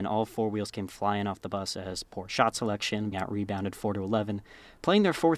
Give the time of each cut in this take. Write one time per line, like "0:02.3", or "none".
0:03.1